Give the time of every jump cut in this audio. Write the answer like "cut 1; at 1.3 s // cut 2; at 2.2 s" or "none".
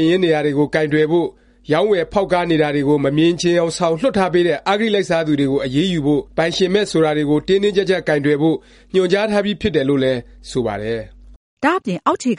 cut 1; at 6.3 s